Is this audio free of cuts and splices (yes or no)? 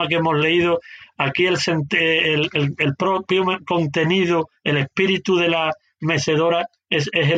yes